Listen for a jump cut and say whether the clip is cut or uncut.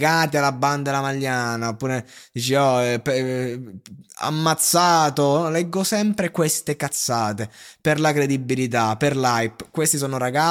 uncut